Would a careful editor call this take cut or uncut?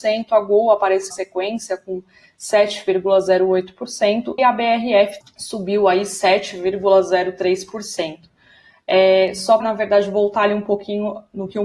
cut